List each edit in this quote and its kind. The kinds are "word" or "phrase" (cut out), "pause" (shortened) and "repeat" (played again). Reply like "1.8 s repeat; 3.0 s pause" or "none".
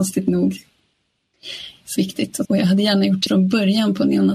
2.0 s phrase; 2.4 s phrase; 3.3 s word